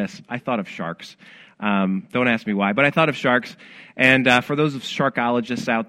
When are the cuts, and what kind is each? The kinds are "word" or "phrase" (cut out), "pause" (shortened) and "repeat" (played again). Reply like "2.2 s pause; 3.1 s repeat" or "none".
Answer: none

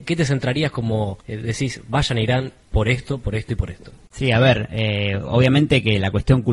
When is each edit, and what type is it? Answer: 1.2 s pause; 2.6 s pause

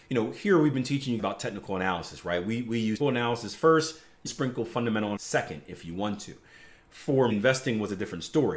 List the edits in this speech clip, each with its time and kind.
1.2 s word; 3.0 s word; 4.3 s word; 5.2 s word; 7.3 s word

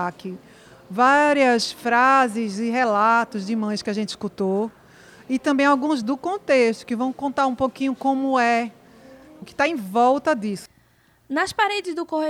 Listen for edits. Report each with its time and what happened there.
6.0 s word; 9.4 s word

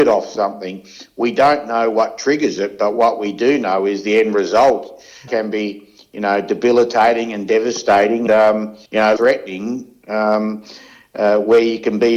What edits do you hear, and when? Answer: 5.3 s word; 8.3 s word; 8.9 s pause; 9.2 s word

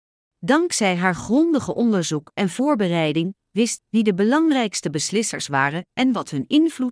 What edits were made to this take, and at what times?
3.8 s word

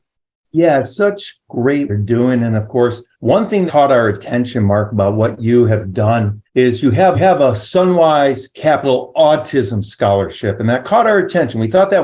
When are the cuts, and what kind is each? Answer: 1.9 s phrase; 3.1 s pause; 3.7 s word; 6.5 s pause; 7.1 s repeat

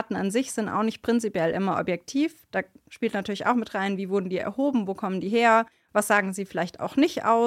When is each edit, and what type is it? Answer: none

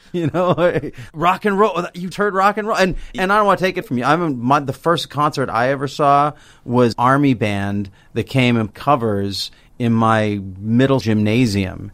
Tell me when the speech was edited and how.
1.1 s word; 2.1 s word; 3.8 s word; 6.9 s word; 8.7 s word; 11.0 s word

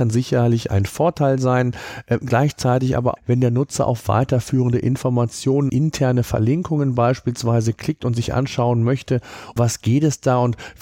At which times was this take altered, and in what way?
3.2 s word; 5.7 s word; 9.6 s word

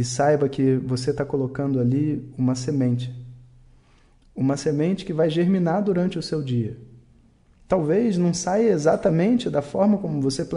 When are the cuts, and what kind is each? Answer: none

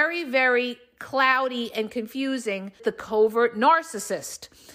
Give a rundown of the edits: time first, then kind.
2.8 s word

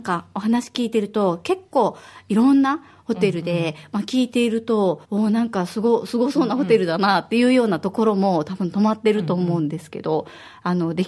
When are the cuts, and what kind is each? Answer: 5.0 s pause

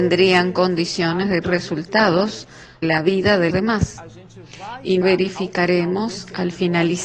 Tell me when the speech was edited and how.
1.4 s word; 2.8 s word; 3.5 s word; 5.0 s word

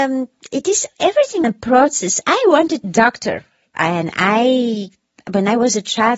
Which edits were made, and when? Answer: 1.4 s phrase; 2.2 s word; 2.8 s phrase

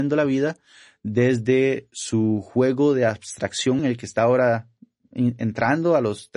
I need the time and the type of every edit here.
3.8 s word

